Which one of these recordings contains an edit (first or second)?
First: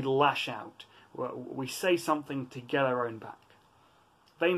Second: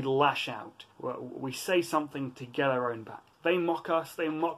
second